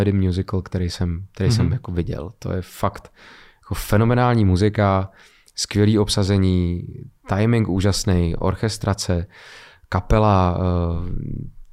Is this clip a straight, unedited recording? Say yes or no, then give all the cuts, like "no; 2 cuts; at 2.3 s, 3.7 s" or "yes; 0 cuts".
yes; 0 cuts